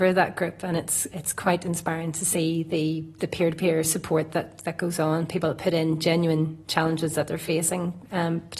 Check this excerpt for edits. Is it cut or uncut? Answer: uncut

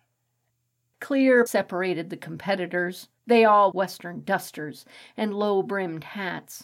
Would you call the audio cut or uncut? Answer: cut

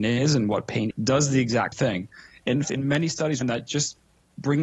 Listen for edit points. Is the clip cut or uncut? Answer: cut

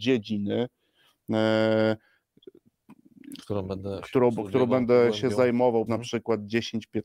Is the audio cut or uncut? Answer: cut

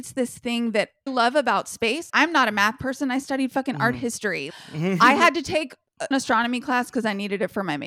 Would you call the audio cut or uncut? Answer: cut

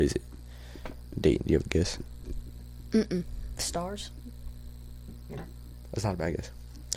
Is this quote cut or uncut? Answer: uncut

